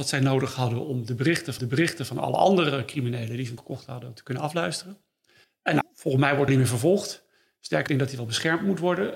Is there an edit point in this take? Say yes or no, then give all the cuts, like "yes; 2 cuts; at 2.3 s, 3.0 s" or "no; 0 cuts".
yes; 6 cuts; at 1.6 s, 3.6 s, 5.4 s, 5.8 s, 6.5 s, 7.9 s